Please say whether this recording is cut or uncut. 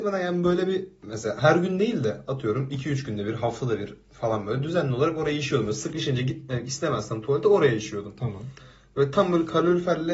uncut